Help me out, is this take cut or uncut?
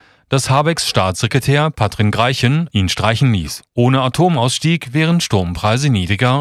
cut